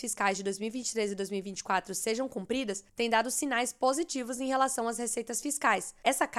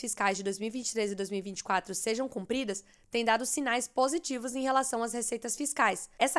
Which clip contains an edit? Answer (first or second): first